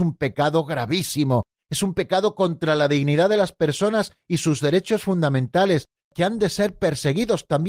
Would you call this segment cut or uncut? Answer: uncut